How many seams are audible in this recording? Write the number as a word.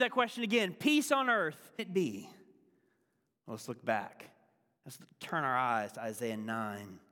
one